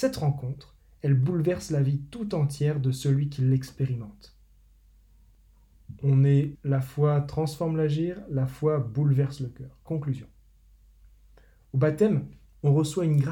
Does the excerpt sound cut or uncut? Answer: cut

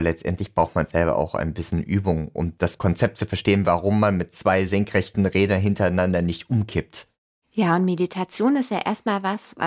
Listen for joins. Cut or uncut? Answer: uncut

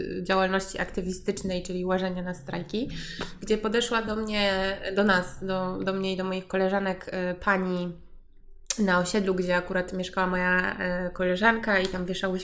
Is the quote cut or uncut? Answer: uncut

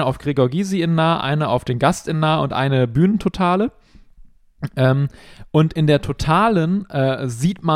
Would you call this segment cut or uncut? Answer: uncut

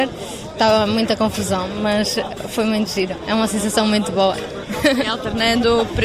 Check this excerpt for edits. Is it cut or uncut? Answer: uncut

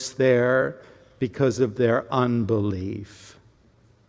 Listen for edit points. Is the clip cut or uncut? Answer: uncut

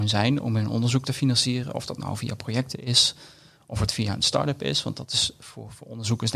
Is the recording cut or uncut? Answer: uncut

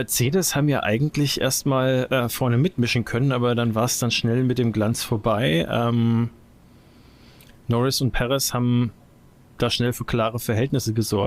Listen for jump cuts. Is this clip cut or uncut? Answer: uncut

